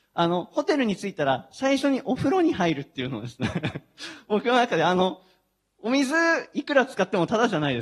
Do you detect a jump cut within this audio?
no; 0 cuts

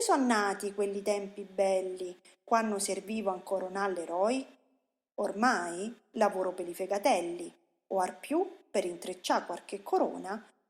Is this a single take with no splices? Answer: yes; 0 cuts

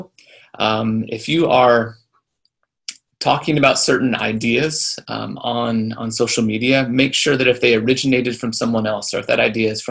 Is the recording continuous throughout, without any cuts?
yes; 0 cuts

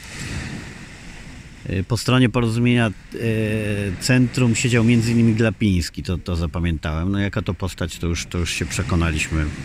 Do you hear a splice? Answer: no; 0 cuts

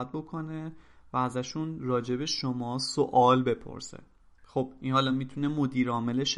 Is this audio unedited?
yes; 0 cuts

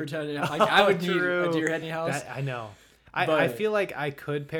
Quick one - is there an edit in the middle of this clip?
yes; 1 cut; at 1.8 s

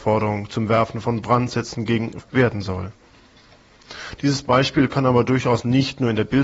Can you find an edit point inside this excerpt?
yes; 1 cut; at 2.2 s

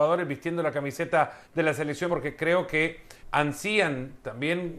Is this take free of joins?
no; 3 cuts; at 1.4 s, 2.1 s, 3.2 s

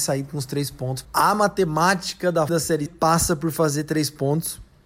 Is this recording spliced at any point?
yes; 3 cuts; at 1.0 s, 2.5 s, 2.9 s

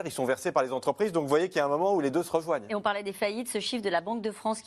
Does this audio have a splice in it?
no; 0 cuts

